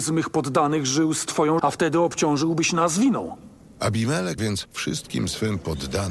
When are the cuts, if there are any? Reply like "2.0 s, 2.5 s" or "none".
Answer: 1.6 s, 4.4 s